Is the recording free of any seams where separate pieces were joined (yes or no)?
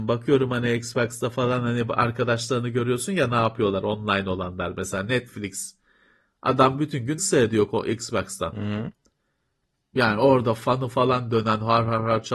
no